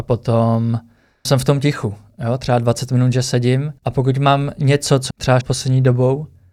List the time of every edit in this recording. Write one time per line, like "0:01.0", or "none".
0:01.2
0:03.8
0:05.1
0:05.4